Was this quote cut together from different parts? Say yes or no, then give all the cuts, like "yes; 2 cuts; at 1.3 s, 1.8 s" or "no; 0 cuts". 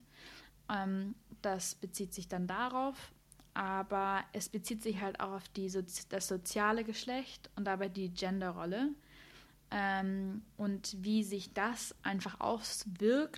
no; 0 cuts